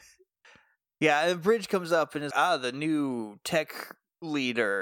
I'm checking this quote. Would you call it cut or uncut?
cut